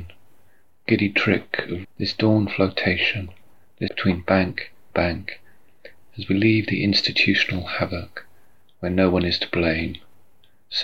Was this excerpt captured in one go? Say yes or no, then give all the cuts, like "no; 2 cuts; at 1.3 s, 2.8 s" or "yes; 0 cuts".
no; 3 cuts; at 1.8 s, 3.9 s, 4.9 s